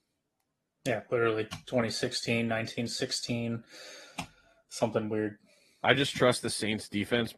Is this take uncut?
yes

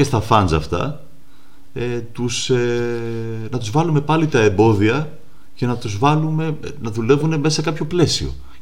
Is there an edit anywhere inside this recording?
no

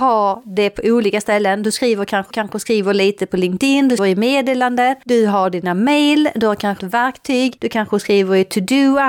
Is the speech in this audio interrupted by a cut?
yes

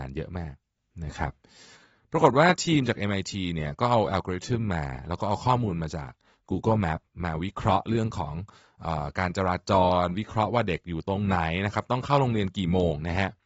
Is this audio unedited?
yes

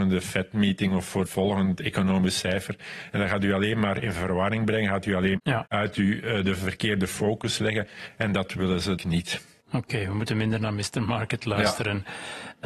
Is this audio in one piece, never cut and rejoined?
no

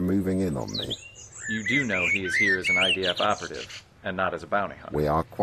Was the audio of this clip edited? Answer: no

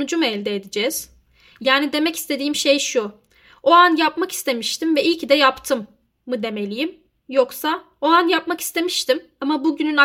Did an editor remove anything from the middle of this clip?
no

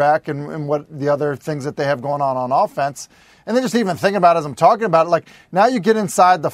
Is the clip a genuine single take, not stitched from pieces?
yes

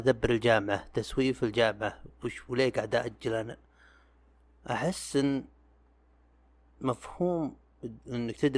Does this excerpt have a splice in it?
no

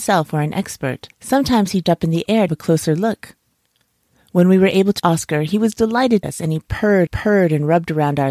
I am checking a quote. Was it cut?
yes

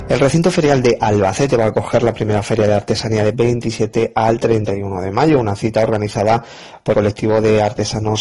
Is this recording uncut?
no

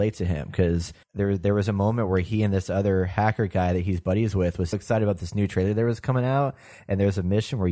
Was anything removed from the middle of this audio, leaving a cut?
yes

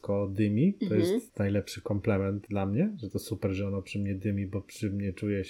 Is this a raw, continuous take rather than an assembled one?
yes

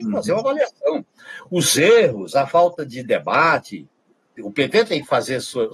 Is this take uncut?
yes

